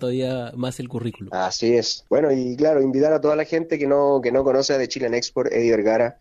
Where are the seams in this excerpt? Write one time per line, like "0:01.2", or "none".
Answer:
0:02.1